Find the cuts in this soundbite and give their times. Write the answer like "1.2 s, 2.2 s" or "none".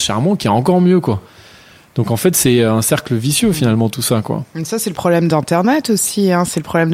none